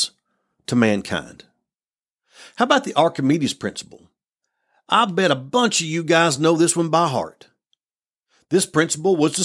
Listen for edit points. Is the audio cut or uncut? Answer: uncut